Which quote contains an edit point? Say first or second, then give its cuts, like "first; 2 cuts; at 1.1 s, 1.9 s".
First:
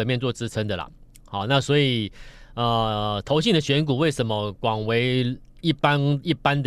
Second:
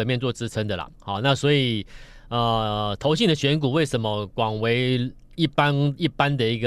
second; 1 cut; at 0.9 s